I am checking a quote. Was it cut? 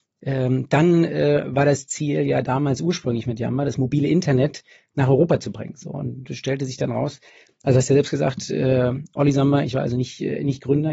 no; 0 cuts

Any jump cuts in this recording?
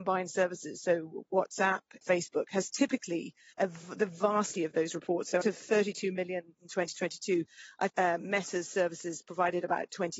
yes; 6 cuts; at 2.0 s, 3.5 s, 4.6 s, 5.4 s, 6.6 s, 7.9 s

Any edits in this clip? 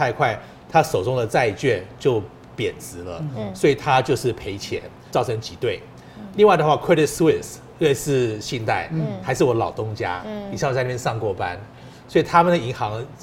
yes; 1 cut; at 5.1 s

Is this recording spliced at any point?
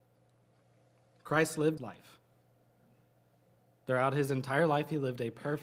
yes; 1 cut; at 1.8 s

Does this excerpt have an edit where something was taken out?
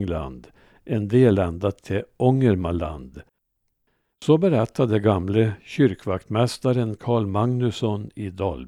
no; 0 cuts

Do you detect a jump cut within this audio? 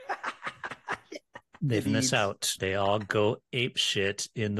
yes; 2 cuts; at 1.8 s, 2.6 s

